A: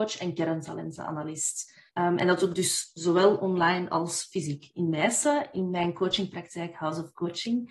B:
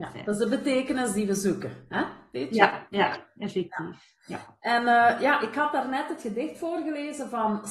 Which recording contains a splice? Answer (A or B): A